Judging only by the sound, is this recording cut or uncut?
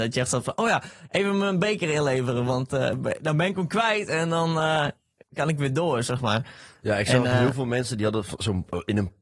uncut